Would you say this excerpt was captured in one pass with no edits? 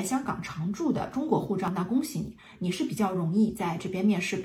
yes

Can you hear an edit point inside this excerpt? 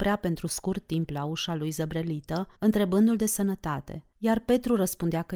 yes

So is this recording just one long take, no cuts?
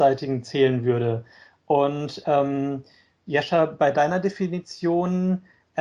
yes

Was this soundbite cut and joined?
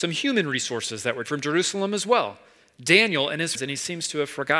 yes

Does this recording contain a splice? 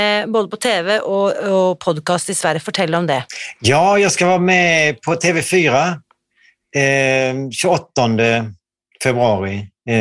no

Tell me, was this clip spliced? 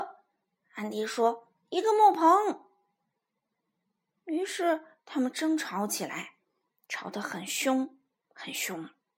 no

